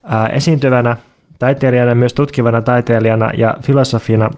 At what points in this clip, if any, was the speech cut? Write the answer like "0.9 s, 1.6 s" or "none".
none